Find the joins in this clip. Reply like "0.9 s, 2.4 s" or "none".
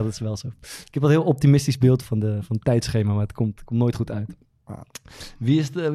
2.0 s